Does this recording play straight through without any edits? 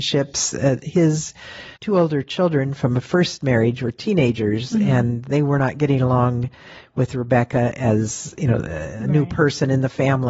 no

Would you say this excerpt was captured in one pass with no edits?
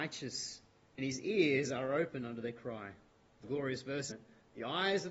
no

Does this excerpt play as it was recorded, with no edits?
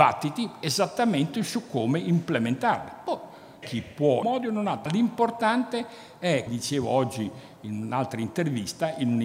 no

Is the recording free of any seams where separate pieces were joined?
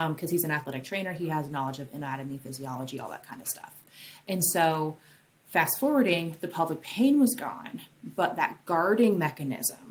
yes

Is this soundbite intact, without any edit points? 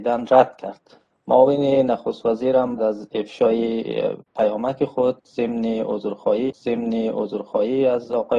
no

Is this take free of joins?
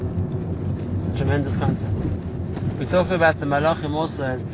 yes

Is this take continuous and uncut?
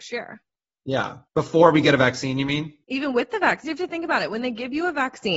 no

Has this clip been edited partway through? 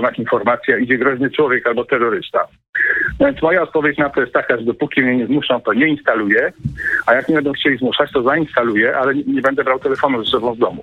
no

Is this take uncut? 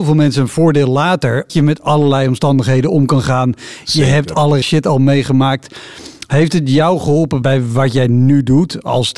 no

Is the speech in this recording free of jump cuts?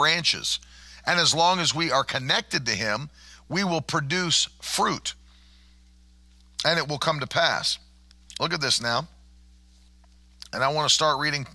yes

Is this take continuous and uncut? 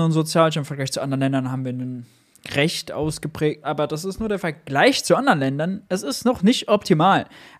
no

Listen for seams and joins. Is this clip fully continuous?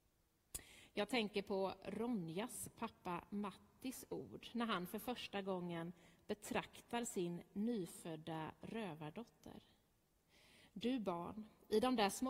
yes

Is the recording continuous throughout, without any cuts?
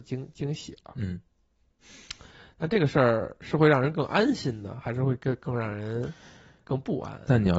yes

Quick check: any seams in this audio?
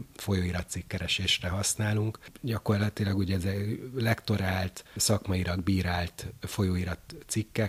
no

